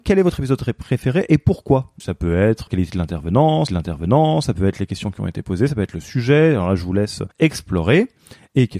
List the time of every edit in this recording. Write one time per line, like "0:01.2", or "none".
0:02.0
0:02.7
0:03.7
0:07.3